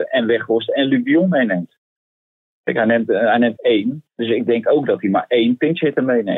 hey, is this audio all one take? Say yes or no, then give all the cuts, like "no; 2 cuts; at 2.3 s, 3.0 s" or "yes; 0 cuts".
no; 2 cuts; at 3.6 s, 4.1 s